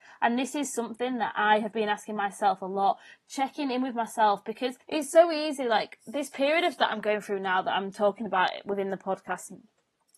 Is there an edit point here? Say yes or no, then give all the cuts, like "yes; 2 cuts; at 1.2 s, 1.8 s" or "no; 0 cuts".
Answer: yes; 1 cut; at 4.8 s